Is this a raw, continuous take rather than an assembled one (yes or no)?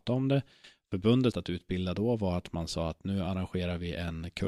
no